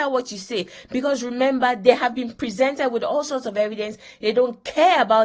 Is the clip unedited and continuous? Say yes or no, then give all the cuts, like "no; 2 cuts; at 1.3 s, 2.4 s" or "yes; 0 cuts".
yes; 0 cuts